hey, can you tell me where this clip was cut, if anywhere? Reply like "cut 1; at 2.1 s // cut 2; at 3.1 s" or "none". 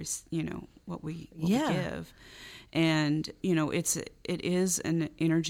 cut 1; at 3.4 s